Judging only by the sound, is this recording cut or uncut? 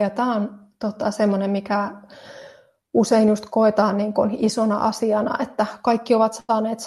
uncut